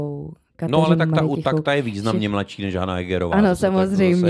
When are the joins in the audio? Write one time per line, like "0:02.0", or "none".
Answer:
none